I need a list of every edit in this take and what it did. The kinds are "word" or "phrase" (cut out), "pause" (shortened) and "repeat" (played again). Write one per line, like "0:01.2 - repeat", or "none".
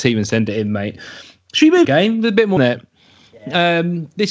0:01.8 - phrase
0:02.6 - phrase